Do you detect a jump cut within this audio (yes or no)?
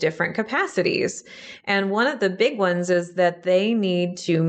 no